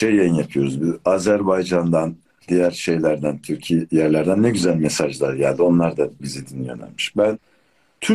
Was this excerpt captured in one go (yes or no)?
yes